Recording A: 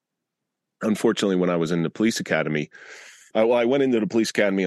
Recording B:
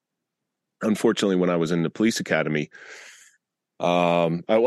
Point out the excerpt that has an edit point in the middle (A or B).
A